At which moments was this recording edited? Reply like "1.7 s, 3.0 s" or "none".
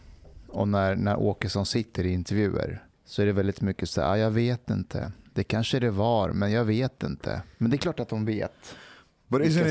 2.9 s, 7.5 s